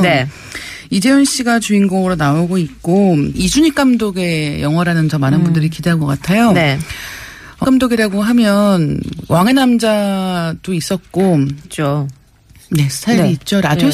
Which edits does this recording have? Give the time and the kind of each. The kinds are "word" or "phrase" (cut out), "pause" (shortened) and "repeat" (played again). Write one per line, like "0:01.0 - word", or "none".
0:03.3 - word
0:05.1 - word
0:06.0 - word
0:07.6 - word
0:11.6 - phrase